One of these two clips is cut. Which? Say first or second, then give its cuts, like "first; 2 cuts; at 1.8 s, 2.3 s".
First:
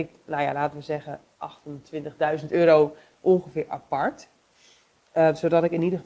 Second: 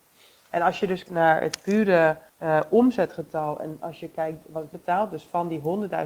second; 3 cuts; at 1.1 s, 2.3 s, 4.7 s